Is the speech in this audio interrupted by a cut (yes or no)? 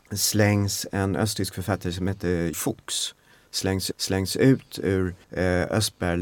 yes